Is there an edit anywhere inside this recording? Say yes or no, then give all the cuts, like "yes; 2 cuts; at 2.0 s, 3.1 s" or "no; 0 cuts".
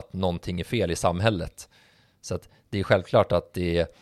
no; 0 cuts